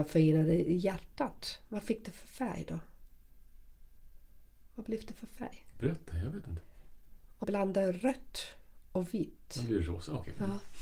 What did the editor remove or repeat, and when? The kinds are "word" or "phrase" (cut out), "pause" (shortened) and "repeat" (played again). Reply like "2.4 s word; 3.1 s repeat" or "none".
7.4 s word